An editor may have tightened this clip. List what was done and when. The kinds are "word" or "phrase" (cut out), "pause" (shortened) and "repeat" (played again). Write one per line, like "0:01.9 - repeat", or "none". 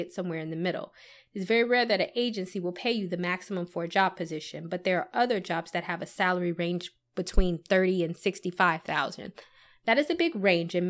none